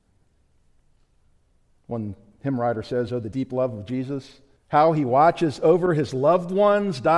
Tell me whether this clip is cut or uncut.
cut